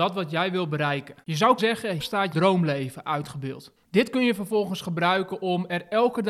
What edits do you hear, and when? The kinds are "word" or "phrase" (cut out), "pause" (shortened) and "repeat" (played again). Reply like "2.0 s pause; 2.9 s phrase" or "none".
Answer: 1.2 s pause; 1.6 s word; 2.0 s word; 2.3 s word; 3.8 s pause